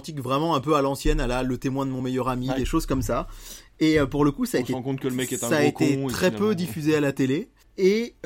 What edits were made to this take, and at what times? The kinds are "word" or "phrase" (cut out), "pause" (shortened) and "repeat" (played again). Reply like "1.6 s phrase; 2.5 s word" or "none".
none